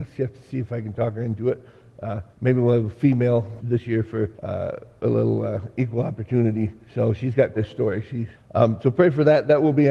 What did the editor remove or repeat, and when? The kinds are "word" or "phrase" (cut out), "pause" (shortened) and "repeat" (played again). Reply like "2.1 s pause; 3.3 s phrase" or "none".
2.3 s pause; 3.6 s word; 4.3 s pause; 6.8 s pause; 7.6 s word; 8.4 s pause